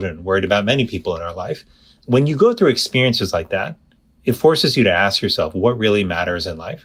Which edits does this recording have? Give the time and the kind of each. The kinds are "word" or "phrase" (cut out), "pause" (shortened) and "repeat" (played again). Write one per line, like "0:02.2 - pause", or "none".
none